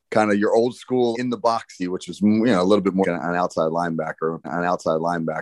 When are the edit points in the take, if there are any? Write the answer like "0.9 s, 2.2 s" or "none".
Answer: 1.1 s, 1.8 s, 3.0 s, 4.4 s